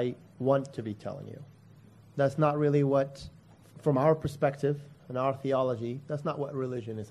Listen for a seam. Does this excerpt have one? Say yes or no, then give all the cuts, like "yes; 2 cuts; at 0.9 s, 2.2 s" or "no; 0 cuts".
no; 0 cuts